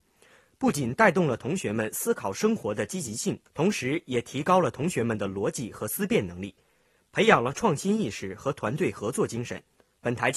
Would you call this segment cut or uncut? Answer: cut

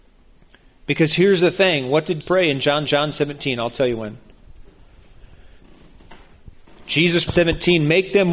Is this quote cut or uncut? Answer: cut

